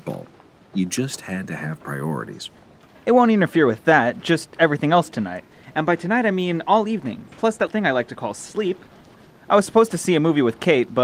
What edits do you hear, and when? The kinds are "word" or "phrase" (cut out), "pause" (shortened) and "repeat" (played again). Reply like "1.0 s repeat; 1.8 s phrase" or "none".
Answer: 7.7 s word